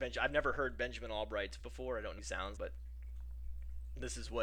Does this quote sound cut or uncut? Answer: cut